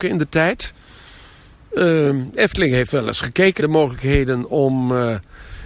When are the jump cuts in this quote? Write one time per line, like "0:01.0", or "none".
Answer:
0:03.6